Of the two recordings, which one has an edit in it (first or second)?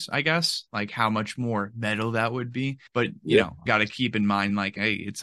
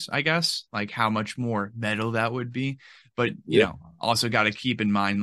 first